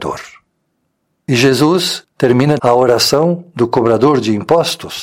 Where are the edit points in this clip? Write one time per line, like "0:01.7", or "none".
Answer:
0:02.6